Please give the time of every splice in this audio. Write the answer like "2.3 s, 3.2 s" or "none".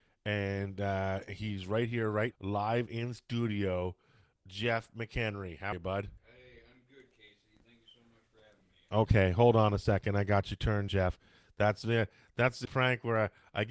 2.3 s, 5.7 s, 10.9 s, 12.7 s